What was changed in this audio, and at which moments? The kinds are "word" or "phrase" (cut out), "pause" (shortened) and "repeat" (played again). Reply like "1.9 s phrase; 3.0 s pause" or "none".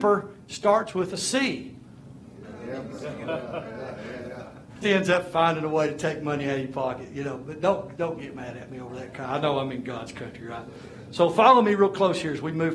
4.8 s word